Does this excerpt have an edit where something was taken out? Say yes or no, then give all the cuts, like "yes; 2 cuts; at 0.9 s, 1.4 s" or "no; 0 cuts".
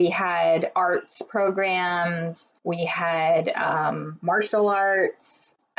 yes; 1 cut; at 2.6 s